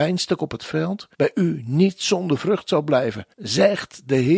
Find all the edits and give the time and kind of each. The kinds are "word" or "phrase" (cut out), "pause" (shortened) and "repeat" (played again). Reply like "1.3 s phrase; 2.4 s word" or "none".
1.1 s pause; 3.3 s pause